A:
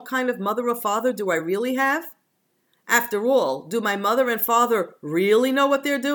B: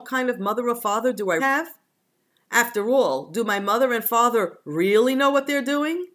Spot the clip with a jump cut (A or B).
B